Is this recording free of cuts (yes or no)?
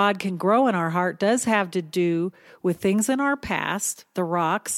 yes